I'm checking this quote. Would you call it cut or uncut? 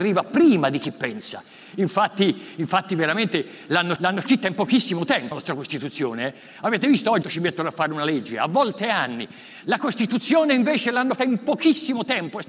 cut